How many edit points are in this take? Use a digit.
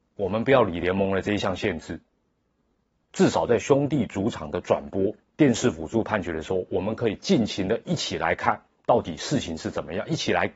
1